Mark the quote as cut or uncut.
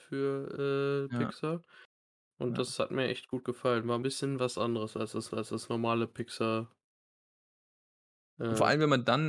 cut